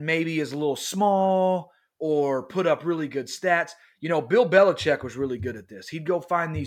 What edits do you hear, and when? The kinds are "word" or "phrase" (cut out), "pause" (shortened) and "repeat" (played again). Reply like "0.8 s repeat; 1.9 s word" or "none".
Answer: none